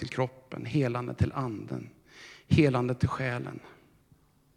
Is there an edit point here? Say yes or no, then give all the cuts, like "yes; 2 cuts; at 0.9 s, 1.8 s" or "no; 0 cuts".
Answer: no; 0 cuts